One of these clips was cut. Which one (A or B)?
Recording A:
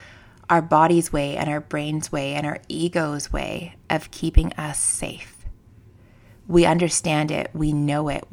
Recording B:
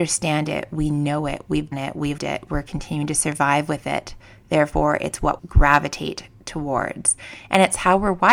B